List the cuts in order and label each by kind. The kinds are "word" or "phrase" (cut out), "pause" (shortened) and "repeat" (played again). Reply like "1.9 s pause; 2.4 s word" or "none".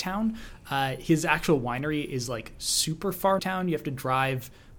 3.4 s phrase